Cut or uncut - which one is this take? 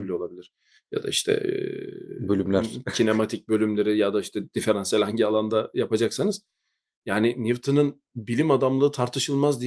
uncut